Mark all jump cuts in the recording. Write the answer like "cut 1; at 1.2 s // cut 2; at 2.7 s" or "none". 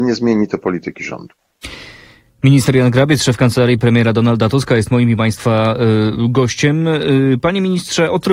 none